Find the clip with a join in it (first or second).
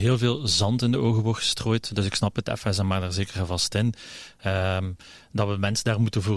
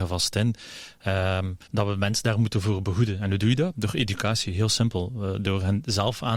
second